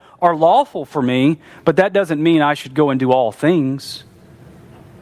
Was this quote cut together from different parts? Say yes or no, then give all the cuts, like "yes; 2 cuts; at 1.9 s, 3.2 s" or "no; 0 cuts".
no; 0 cuts